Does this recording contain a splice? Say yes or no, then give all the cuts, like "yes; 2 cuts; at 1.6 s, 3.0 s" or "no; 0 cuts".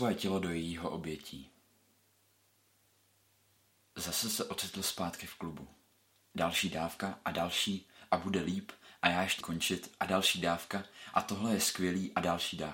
yes; 1 cut; at 9.4 s